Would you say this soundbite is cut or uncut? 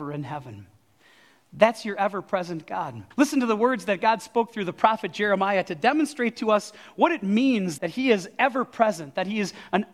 cut